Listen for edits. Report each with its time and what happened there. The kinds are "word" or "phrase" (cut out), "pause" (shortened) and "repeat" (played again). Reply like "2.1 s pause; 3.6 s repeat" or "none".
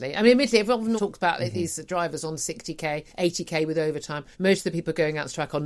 1.0 s word; 3.1 s pause; 4.3 s pause